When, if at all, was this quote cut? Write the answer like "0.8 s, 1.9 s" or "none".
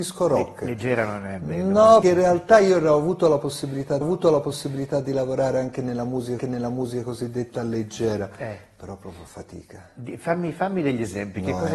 2.0 s, 4.0 s, 6.4 s, 9.3 s